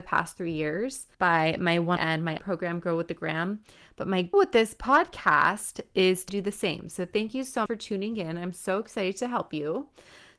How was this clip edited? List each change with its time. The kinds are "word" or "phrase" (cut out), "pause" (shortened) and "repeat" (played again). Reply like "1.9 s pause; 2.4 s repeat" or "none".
1.1 s pause; 2.0 s phrase; 2.4 s word; 4.3 s word; 6.3 s phrase; 7.7 s word